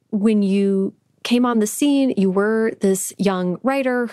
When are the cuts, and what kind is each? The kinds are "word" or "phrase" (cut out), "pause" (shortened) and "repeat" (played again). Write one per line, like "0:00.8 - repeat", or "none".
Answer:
none